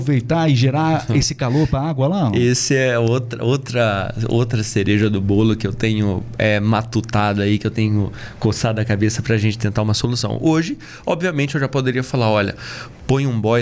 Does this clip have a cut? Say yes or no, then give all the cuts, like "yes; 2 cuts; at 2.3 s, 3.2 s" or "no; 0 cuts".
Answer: no; 0 cuts